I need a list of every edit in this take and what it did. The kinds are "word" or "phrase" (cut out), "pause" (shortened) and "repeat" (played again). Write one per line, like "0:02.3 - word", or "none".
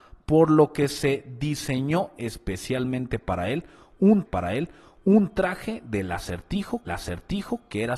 0:04.3 - repeat
0:06.9 - repeat